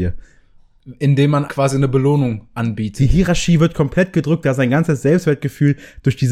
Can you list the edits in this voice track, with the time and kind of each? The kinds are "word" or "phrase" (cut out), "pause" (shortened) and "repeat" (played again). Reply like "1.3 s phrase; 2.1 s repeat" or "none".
1.5 s word